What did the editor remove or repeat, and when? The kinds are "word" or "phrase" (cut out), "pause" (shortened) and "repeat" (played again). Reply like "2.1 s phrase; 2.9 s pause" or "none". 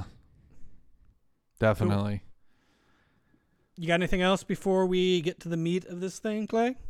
none

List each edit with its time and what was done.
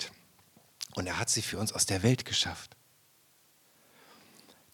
none

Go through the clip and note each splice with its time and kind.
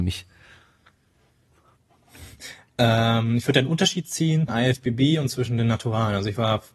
4.5 s word

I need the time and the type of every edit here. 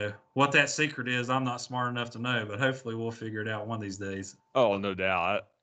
4.4 s pause

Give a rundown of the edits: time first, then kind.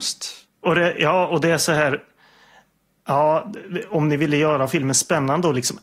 none

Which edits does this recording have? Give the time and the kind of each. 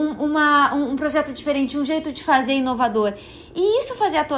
none

